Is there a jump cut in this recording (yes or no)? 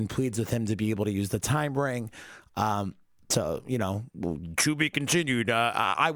no